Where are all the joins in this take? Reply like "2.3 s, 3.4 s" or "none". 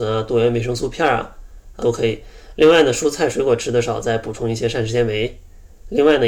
1.8 s